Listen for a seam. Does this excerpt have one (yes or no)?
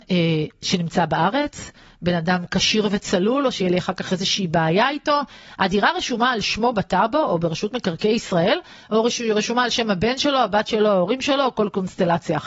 no